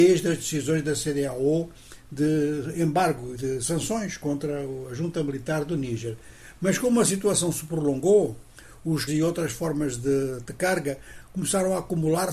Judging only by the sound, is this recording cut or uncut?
cut